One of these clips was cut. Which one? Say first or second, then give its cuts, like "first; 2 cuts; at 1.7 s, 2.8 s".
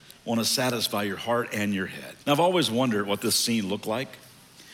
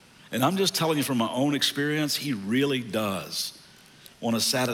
first; 1 cut; at 2.2 s